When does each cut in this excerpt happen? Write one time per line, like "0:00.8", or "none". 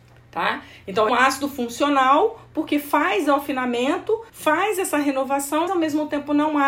0:01.1
0:04.3
0:05.7